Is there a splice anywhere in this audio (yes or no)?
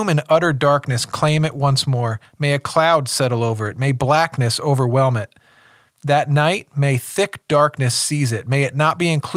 no